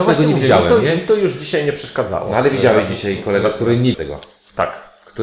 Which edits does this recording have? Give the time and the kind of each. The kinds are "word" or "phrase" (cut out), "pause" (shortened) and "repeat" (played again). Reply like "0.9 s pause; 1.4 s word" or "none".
3.9 s word